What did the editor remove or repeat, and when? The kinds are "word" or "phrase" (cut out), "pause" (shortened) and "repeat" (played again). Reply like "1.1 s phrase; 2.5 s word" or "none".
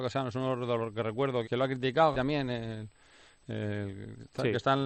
1.4 s word; 2.1 s word